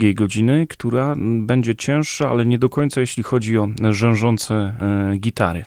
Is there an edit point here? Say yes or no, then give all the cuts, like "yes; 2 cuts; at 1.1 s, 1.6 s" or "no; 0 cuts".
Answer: no; 0 cuts